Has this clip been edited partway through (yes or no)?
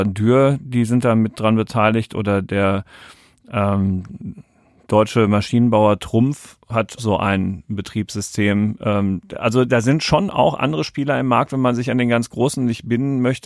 yes